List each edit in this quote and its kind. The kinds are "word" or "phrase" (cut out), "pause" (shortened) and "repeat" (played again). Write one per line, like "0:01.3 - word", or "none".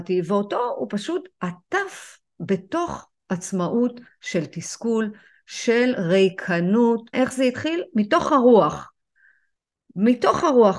0:07.1 - phrase